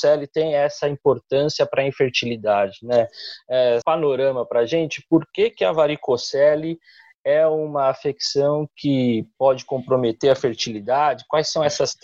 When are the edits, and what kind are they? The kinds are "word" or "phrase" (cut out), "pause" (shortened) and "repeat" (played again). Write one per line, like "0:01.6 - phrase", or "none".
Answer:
0:03.8 - phrase